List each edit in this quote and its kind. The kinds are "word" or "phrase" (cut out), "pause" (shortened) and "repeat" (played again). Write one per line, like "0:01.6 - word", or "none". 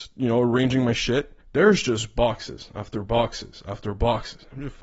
0:01.4 - pause